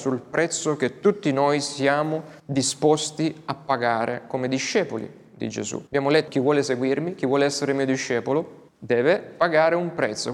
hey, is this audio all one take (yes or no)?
no